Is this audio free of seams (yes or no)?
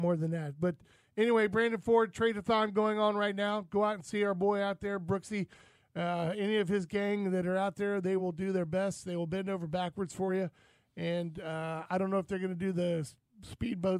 yes